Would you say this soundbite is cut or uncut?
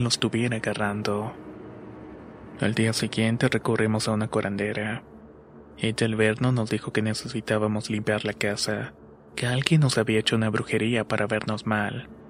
uncut